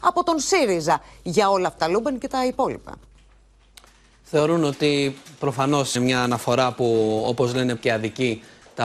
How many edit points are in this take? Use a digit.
3